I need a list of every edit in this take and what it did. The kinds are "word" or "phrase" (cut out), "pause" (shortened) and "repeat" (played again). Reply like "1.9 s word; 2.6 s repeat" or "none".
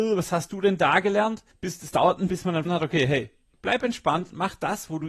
1.5 s pause; 2.3 s word; 2.6 s word; 3.5 s pause